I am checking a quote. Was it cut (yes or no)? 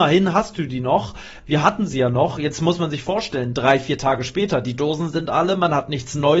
no